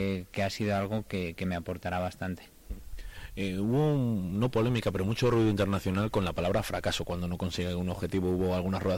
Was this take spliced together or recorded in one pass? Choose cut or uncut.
uncut